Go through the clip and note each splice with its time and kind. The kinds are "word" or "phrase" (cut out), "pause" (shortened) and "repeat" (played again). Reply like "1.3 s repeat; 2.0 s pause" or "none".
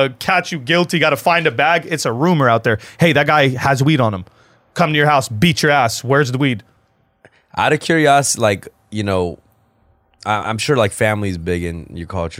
none

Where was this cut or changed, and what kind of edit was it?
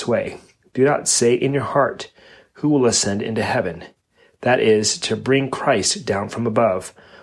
none

